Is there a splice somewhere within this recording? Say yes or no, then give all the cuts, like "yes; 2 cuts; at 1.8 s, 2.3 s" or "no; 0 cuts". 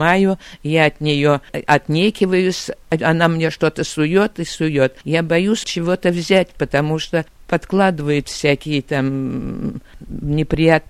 yes; 1 cut; at 5.6 s